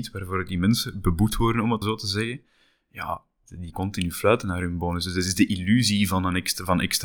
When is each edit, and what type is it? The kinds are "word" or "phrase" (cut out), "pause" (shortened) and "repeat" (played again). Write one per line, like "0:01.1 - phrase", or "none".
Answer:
0:01.8 - word
0:03.7 - word